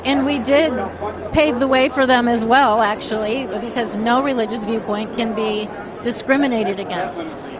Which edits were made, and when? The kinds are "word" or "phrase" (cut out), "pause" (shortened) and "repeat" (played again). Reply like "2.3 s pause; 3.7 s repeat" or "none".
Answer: none